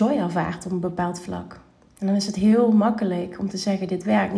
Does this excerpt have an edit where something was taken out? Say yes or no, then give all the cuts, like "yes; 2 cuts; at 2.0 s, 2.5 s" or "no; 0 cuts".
no; 0 cuts